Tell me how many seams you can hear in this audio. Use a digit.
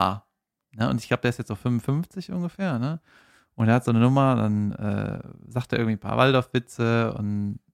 0